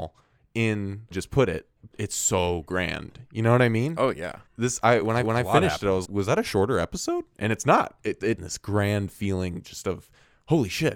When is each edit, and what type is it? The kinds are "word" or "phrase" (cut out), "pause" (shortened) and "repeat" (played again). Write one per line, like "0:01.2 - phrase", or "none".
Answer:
0:01.1 - phrase
0:01.9 - word
0:04.5 - pause
0:05.2 - repeat
0:06.0 - word
0:08.4 - phrase

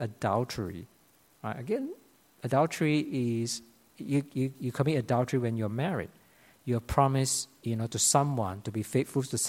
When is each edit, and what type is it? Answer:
none

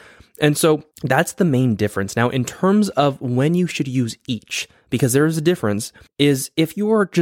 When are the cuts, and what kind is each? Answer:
0:00.9 - pause
0:06.1 - pause

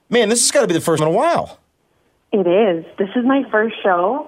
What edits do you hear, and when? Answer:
0:01.0 - word

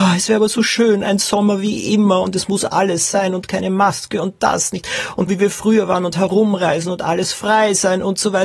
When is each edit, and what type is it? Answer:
0:05.3 - word

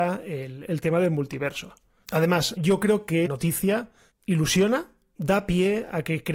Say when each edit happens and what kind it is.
0:02.6 - word
0:03.3 - word
0:05.2 - word

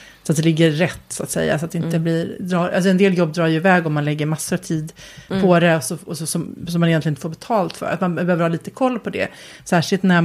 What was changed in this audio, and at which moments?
none

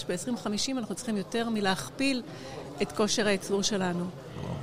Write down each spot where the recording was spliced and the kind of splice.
none

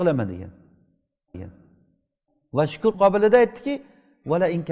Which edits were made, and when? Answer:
0:01.3 - repeat
0:02.9 - word

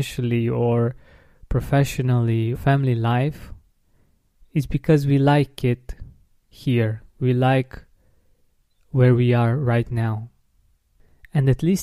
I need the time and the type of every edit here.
0:02.5 - phrase

